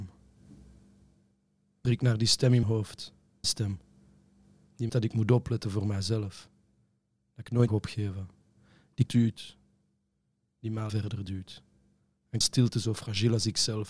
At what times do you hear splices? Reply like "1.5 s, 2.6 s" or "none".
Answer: 1.8 s, 2.6 s, 3.4 s, 4.9 s, 7.7 s, 9.1 s, 10.9 s, 12.4 s